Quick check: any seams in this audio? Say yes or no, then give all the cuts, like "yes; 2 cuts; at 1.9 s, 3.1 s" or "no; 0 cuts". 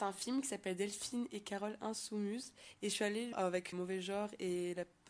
yes; 2 cuts; at 3.3 s, 3.7 s